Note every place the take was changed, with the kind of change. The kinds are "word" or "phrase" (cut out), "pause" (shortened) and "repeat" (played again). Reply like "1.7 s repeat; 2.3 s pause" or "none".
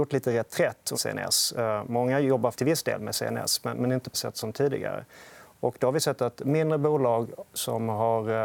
0.9 s word; 2.5 s word; 4.1 s word